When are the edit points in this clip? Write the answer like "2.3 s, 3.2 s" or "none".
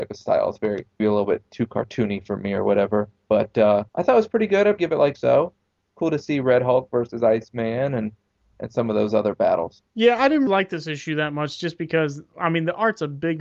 1.0 s, 3.9 s, 4.8 s, 5.1 s, 9.9 s, 10.5 s